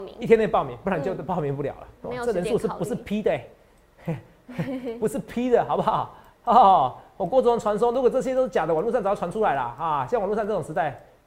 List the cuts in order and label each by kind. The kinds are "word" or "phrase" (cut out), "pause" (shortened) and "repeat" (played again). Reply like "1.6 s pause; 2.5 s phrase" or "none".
2.0 s word

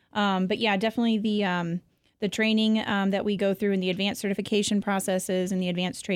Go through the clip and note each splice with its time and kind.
none

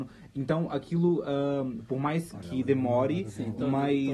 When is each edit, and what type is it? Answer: 2.3 s word

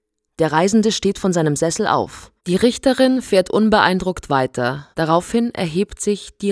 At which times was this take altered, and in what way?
2.4 s pause; 4.9 s pause

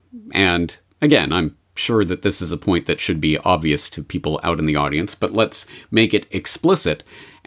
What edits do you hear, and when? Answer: none

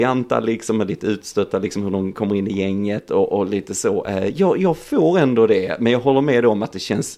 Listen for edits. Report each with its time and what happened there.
none

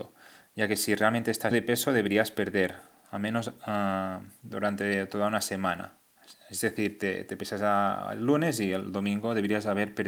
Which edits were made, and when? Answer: 1.5 s phrase

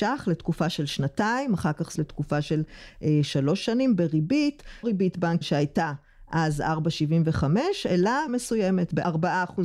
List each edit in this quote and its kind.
1.9 s phrase; 4.8 s phrase; 5.4 s word; 8.3 s word

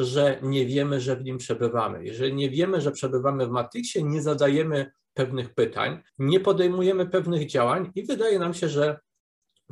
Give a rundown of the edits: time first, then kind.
6.1 s pause

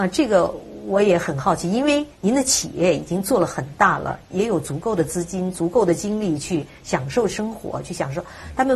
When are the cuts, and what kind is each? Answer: 2.1 s pause

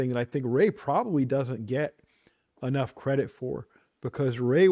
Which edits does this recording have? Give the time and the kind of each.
none

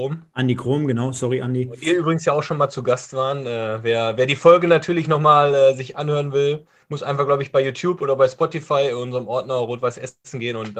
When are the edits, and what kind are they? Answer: none

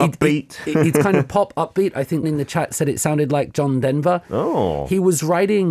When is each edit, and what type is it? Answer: 2.2 s word

